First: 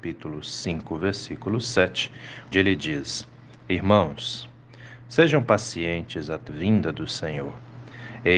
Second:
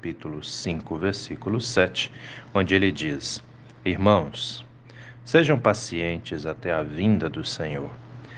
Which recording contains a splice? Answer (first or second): first